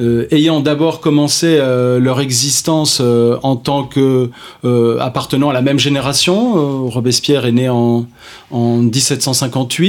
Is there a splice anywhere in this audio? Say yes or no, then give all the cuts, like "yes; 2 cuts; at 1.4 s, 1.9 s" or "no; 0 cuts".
no; 0 cuts